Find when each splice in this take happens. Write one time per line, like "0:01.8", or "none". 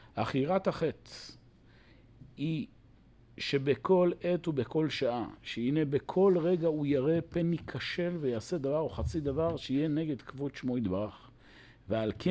none